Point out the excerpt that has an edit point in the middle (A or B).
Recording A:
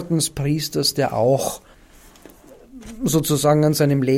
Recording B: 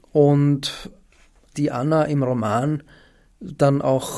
B